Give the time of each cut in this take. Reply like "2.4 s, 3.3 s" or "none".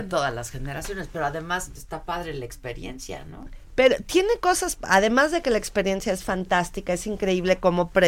1.8 s